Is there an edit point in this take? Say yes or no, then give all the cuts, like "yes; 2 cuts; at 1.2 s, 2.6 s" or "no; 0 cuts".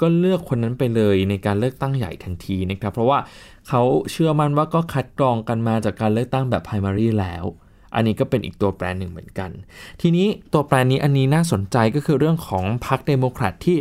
no; 0 cuts